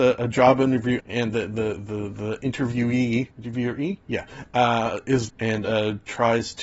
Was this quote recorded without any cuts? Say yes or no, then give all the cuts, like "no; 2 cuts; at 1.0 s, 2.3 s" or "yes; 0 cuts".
no; 4 cuts; at 1.0 s, 1.3 s, 3.3 s, 5.3 s